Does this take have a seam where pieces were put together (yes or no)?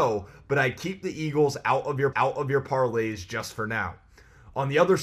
yes